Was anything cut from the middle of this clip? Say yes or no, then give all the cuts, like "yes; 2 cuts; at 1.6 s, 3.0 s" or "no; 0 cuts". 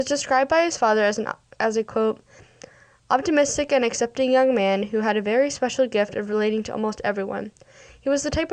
no; 0 cuts